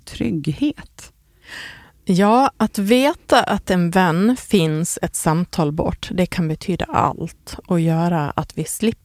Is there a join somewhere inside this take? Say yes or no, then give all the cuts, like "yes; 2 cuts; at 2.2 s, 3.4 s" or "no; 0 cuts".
no; 0 cuts